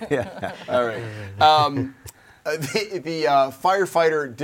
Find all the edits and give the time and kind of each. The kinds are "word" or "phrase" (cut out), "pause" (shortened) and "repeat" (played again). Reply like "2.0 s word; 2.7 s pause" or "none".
none